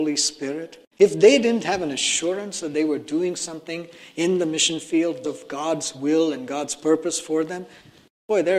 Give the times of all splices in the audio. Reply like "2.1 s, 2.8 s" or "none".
0.9 s, 5.2 s